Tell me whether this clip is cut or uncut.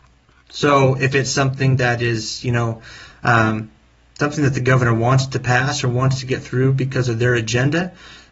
uncut